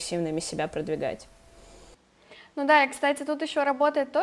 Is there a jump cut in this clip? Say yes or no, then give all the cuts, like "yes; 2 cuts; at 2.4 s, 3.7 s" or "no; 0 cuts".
no; 0 cuts